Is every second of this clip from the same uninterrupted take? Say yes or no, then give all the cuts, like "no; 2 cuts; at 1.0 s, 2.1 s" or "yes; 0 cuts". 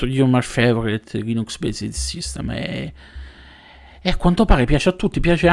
yes; 0 cuts